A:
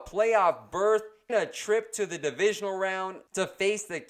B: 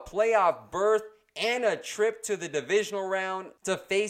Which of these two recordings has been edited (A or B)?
A